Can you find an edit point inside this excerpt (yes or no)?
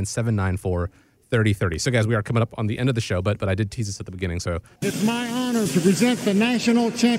no